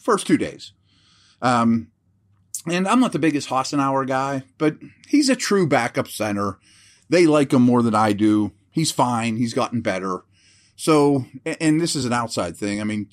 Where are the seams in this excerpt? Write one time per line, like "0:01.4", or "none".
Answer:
none